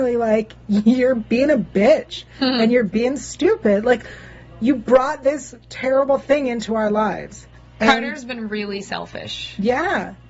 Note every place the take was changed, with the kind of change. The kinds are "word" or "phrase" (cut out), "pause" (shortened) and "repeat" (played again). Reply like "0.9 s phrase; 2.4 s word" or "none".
7.5 s pause